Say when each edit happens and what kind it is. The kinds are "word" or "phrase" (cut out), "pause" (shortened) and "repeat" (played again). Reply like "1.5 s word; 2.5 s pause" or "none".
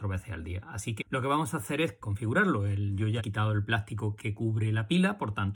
1.0 s word; 2.0 s word; 3.2 s word; 4.2 s word